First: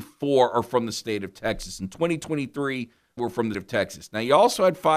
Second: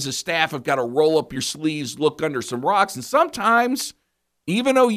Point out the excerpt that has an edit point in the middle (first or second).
first